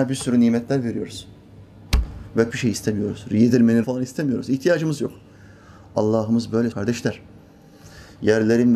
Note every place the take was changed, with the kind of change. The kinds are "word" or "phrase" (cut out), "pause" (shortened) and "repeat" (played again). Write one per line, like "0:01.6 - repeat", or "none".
0:02.5 - phrase
0:03.8 - phrase
0:06.7 - word